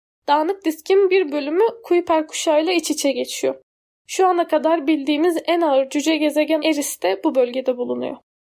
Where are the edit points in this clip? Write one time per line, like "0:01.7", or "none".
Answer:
0:06.6

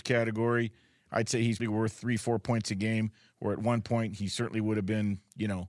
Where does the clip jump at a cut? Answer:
0:01.6

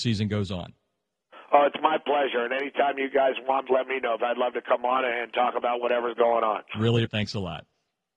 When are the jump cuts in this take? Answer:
0:03.7
0:04.2
0:07.0

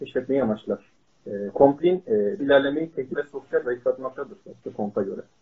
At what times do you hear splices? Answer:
0:01.1
0:01.8
0:02.4
0:03.2
0:03.6
0:04.4

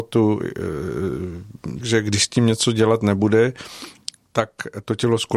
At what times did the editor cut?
0:01.8

